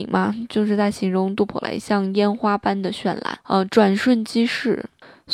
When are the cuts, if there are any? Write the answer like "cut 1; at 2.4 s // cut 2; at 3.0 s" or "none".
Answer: cut 1; at 3.4 s

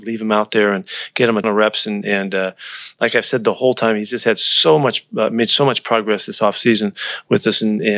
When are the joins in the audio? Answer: cut 1; at 1.4 s

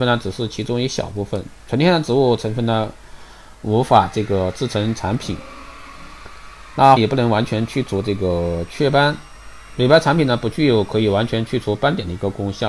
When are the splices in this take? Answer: cut 1; at 7.0 s

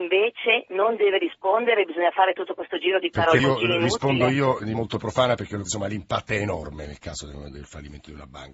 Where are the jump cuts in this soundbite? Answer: cut 1; at 3.4 s // cut 2; at 4.7 s // cut 3; at 5.7 s

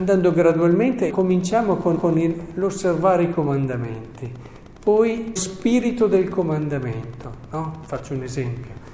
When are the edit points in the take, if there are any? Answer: cut 1; at 1.1 s // cut 2; at 2.0 s // cut 3; at 5.4 s

